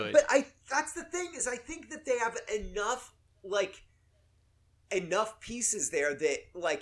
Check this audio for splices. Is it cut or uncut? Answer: uncut